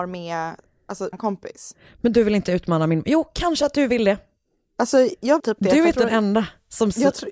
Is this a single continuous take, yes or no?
no